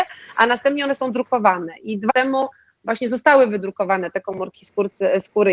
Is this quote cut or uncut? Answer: cut